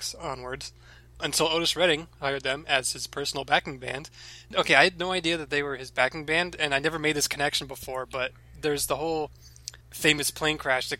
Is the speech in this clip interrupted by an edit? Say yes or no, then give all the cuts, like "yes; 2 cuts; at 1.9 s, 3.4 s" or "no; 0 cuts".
yes; 1 cut; at 9.8 s